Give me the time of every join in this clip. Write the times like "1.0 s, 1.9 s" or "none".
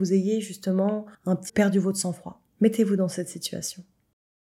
1.1 s, 1.5 s, 2.5 s